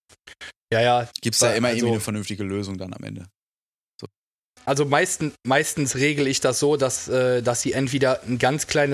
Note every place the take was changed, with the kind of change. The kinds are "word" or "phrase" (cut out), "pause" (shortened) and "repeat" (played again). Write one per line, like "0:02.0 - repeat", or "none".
none